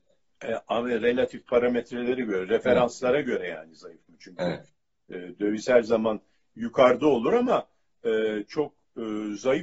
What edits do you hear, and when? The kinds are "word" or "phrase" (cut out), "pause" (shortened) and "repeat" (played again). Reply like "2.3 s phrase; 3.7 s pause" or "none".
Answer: none